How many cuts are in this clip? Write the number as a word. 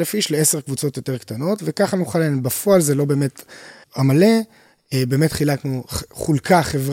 one